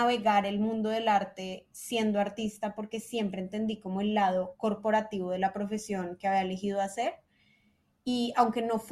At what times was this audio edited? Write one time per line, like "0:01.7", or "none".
none